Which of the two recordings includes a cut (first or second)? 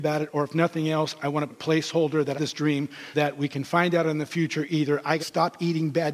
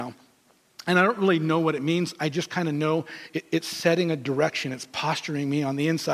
first